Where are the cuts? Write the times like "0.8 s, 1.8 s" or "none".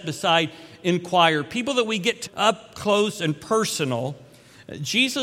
2.3 s